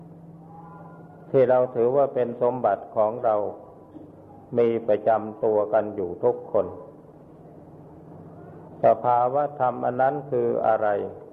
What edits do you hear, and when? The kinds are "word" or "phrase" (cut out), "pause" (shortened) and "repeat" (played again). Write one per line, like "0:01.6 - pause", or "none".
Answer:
none